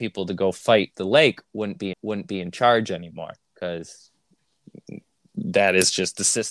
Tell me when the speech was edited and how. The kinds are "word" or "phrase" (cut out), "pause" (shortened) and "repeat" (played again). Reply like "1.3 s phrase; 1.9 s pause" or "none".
0.9 s phrase; 1.9 s repeat